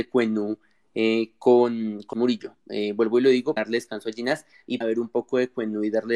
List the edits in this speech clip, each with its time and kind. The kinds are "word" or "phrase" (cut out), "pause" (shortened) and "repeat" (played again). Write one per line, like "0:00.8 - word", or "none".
0:02.1 - word
0:03.6 - word
0:04.8 - word